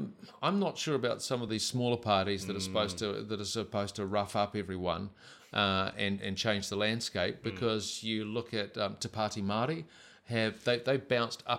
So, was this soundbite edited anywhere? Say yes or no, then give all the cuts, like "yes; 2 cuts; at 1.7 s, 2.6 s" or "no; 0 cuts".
no; 0 cuts